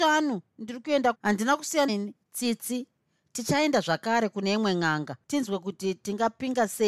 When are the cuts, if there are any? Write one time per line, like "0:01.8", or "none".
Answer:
0:01.1
0:01.9
0:02.2